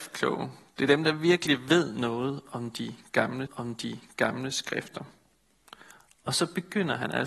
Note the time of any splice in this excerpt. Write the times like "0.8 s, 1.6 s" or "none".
3.5 s